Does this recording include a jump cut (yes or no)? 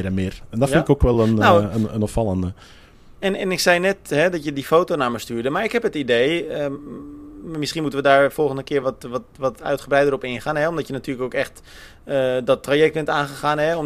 no